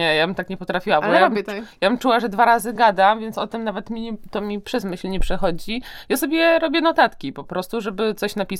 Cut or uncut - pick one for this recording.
uncut